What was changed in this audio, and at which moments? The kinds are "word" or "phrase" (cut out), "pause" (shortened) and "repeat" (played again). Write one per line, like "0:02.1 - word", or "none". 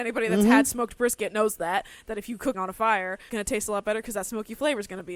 0:02.5 - word
0:03.3 - phrase